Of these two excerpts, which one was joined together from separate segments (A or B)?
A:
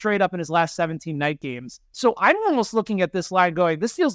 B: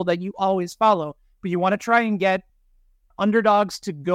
A